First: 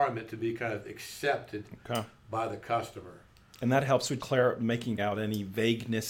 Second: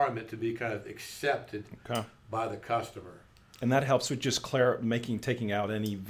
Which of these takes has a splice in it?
first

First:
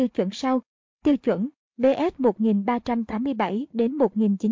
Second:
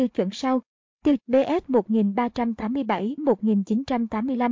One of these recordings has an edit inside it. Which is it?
second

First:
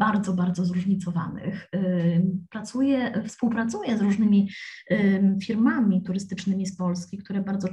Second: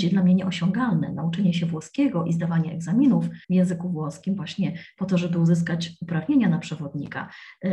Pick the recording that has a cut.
second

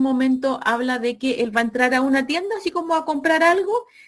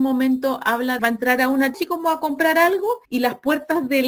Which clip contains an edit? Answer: second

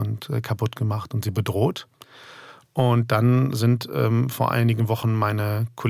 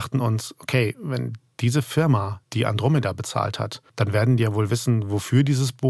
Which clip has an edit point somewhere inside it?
second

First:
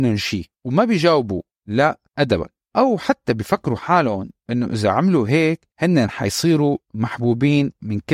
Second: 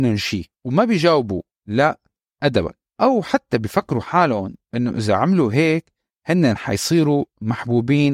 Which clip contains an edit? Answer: first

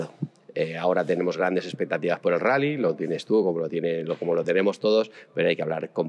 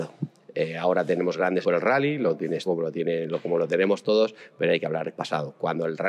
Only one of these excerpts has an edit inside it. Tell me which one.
second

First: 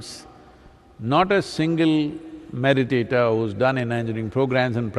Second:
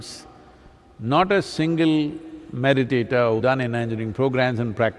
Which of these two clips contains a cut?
second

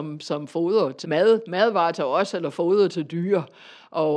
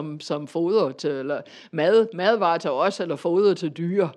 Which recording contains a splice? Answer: first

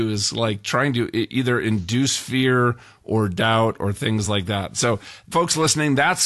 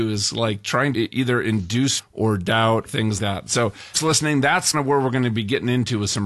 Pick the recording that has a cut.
second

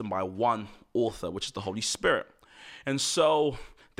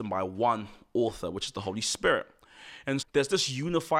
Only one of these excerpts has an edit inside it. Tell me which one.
second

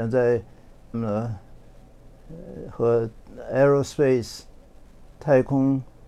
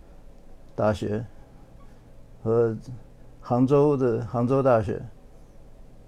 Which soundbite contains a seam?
first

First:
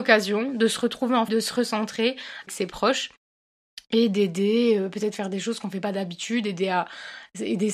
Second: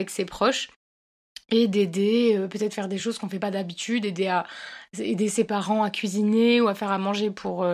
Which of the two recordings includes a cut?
first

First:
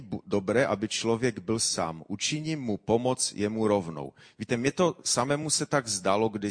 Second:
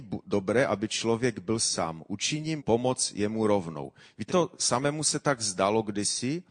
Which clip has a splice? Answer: second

